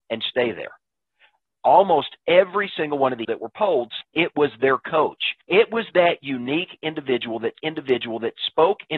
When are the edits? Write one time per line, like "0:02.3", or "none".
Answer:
0:03.2
0:04.0
0:05.4
0:07.6